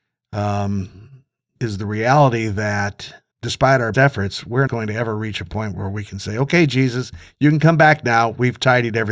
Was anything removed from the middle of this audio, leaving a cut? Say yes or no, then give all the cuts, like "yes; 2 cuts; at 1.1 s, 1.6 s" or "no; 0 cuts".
yes; 4 cuts; at 1.6 s, 3.3 s, 3.9 s, 4.7 s